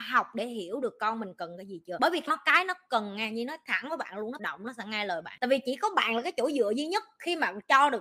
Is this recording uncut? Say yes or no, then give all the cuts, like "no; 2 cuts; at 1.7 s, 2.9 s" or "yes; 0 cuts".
no; 2 cuts; at 2.3 s, 4.4 s